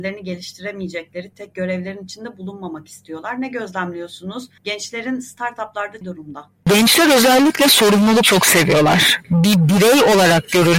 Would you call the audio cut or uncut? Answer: cut